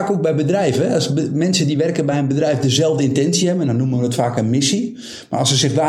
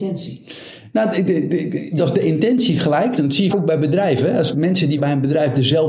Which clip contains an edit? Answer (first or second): second